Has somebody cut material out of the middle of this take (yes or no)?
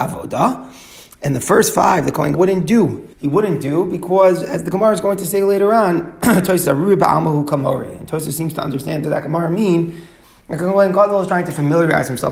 yes